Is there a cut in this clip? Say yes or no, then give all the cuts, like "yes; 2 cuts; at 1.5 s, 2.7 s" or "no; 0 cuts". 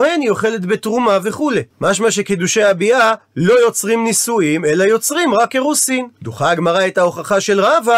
yes; 2 cuts; at 1.7 s, 6.1 s